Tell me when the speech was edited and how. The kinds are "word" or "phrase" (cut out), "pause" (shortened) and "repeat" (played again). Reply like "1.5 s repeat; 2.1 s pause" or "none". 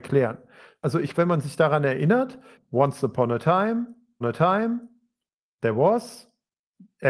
1.1 s word; 4.2 s repeat

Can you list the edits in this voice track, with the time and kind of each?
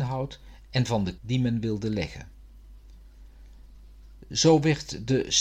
1.2 s word

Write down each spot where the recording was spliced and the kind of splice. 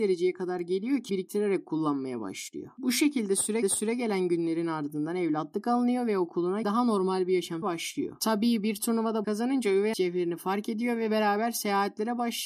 1.1 s word; 3.6 s repeat; 6.6 s word; 7.6 s word; 9.2 s phrase; 9.9 s word

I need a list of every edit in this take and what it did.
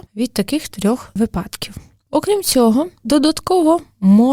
3.0 s word

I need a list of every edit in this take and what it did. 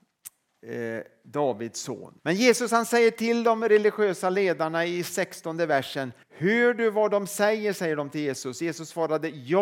2.2 s pause; 6.2 s pause

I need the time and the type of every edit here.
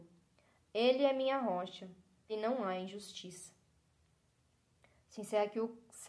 2.3 s word

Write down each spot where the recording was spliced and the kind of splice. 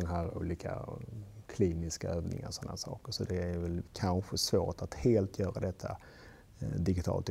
3.9 s pause

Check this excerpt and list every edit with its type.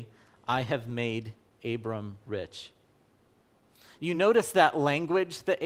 none

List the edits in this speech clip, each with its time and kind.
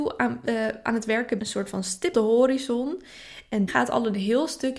1.4 s word; 2.1 s word; 3.7 s word

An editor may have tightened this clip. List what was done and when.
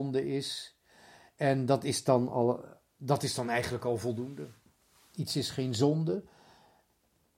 none

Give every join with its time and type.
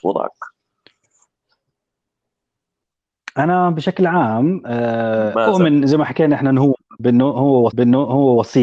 7.7 s repeat

